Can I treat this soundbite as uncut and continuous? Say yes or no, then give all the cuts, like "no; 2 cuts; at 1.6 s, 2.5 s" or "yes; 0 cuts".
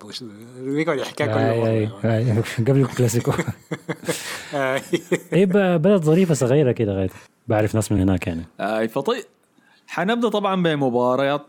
yes; 0 cuts